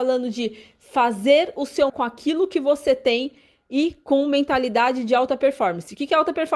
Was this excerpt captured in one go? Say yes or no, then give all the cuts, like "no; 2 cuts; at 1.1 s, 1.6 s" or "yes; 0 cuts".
no; 1 cut; at 1.9 s